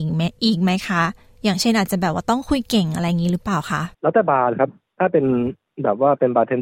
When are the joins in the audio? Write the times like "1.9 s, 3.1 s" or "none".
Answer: 3.9 s